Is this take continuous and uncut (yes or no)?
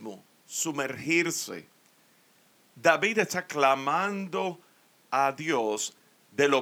yes